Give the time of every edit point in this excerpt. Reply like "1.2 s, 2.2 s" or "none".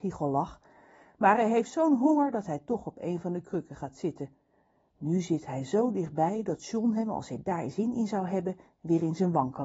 none